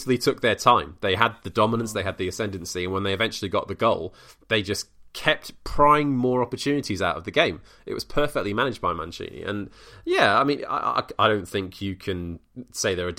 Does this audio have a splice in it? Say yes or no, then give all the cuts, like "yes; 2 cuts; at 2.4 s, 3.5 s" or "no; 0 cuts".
no; 0 cuts